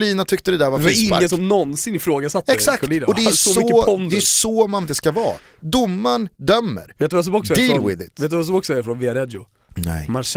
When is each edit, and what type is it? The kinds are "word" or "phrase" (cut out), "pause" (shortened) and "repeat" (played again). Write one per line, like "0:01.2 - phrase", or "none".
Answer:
0:04.9 - phrase

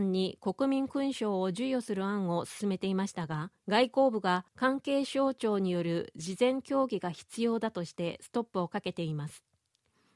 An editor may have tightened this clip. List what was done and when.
0:03.6 - pause
0:04.5 - pause

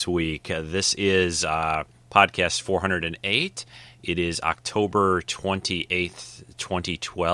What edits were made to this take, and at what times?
none

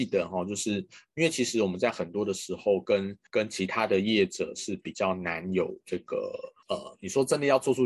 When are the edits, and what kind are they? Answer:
0:03.3 - pause
0:06.6 - pause

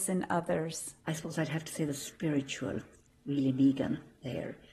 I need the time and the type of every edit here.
0:01.0 - pause

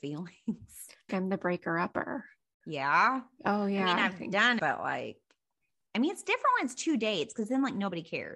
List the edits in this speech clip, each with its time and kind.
0:01.1 - phrase
0:04.6 - word

